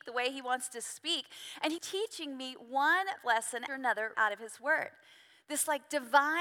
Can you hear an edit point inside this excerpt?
yes; 4 cuts; at 1.8 s, 3.2 s, 3.7 s, 4.1 s

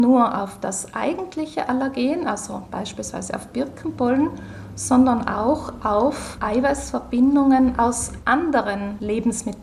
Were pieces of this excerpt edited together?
no; 0 cuts

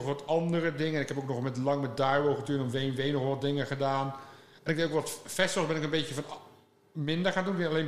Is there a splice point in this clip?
no; 0 cuts

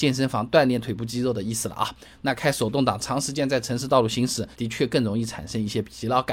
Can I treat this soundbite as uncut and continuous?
no; 1 cut; at 4.5 s

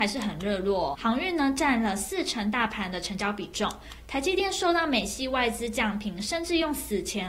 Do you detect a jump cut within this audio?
yes; 1 cut; at 0.9 s

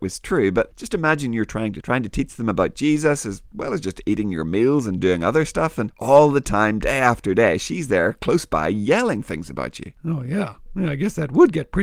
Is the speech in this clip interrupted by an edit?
yes; 2 cuts; at 1.8 s, 10.0 s

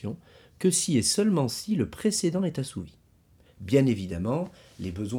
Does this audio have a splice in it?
no; 0 cuts

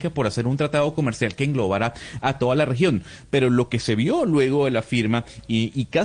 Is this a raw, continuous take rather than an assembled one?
yes; 0 cuts

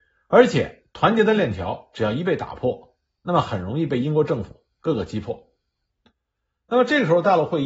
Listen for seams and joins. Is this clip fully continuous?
yes; 0 cuts

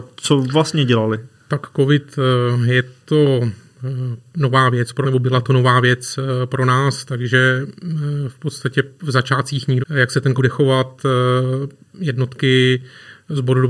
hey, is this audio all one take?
no; 3 cuts; at 5.0 s, 9.8 s, 10.4 s

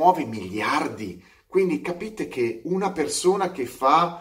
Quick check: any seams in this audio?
no; 0 cuts

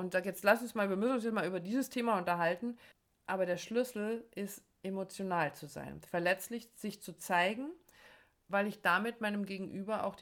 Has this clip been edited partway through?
yes; 1 cut; at 2.9 s

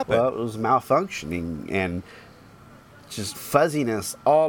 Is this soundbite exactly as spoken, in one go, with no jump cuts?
no; 1 cut; at 3.3 s

